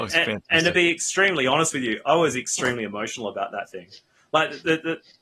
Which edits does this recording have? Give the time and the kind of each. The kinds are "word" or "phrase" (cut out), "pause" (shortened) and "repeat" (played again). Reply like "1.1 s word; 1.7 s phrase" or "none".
none

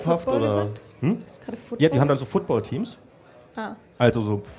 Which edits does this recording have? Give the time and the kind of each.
none

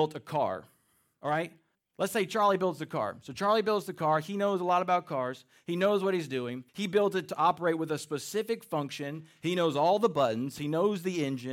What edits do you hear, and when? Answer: 1.7 s pause; 6.7 s pause

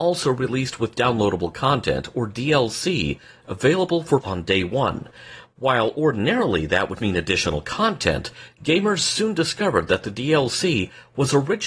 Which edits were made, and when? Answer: 4.2 s word; 7.0 s word

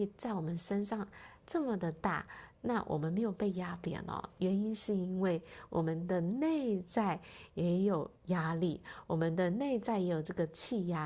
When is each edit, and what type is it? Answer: 8.2 s pause

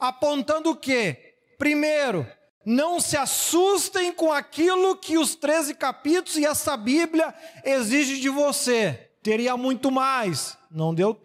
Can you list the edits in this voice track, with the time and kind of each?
none

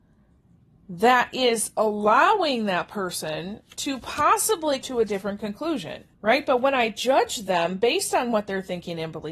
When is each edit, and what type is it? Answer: 4.8 s word; 6.1 s pause

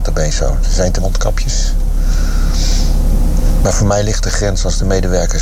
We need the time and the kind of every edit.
1.0 s word

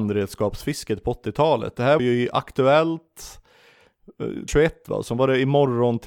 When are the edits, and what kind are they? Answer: 2.0 s word; 4.5 s word

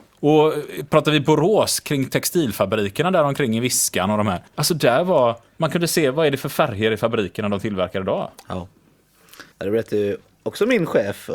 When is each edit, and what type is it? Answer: 4.5 s pause; 9.5 s pause

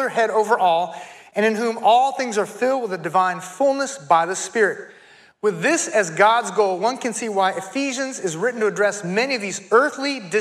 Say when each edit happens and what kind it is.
none

